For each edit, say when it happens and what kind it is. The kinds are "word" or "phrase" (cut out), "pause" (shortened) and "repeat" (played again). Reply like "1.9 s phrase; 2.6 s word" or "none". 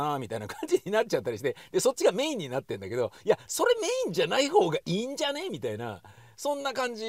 none